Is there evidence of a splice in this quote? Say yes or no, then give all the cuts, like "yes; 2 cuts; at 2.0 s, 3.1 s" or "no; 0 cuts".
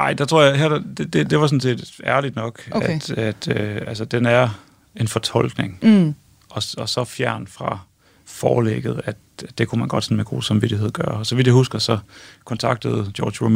no; 0 cuts